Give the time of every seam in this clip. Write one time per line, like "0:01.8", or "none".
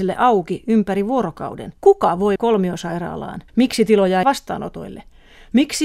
0:01.8
0:02.4
0:03.5
0:04.2